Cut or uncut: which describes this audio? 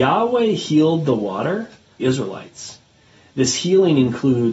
cut